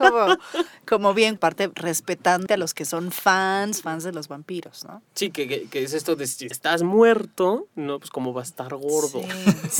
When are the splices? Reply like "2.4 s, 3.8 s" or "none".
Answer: 1.4 s, 2.5 s, 3.8 s, 5.1 s, 6.5 s